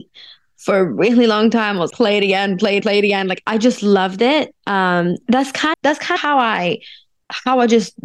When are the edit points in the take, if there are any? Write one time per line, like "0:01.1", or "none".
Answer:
0:01.9
0:02.8
0:03.4
0:05.2
0:05.7
0:06.2